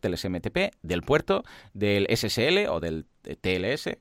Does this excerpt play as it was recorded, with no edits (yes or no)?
yes